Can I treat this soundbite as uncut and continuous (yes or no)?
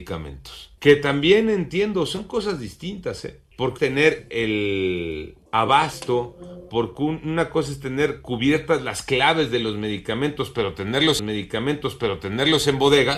no